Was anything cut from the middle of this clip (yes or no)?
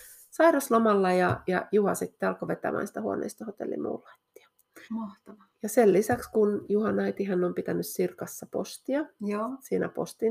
yes